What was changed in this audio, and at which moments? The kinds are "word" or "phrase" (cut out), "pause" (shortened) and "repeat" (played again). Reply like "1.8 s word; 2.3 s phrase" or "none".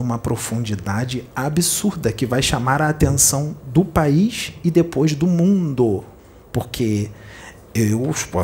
6.2 s pause